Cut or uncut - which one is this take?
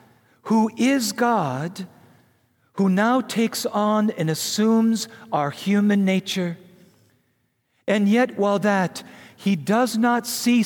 cut